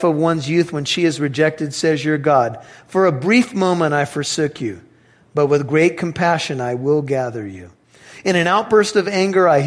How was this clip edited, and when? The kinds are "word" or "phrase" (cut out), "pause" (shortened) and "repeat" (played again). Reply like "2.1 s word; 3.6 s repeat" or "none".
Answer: none